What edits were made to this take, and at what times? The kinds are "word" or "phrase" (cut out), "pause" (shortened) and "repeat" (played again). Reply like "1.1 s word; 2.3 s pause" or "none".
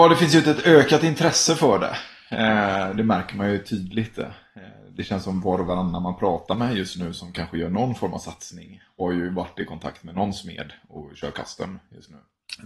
none